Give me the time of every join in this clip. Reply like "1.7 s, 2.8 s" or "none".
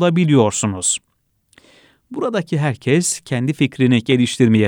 none